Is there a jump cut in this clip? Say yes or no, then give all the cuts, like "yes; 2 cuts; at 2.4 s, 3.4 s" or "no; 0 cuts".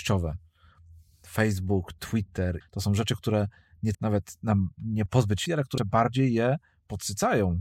yes; 5 cuts; at 2.6 s, 3.9 s, 5.1 s, 5.5 s, 5.8 s